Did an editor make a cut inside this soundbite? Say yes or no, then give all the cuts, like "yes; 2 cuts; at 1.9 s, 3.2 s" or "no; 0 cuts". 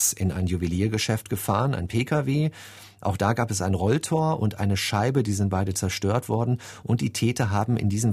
no; 0 cuts